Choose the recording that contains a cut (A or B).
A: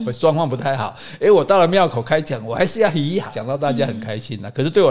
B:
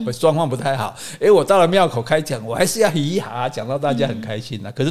A